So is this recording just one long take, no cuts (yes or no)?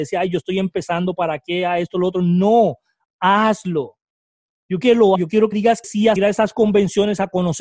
no